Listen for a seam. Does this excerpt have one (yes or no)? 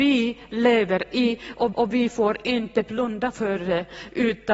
yes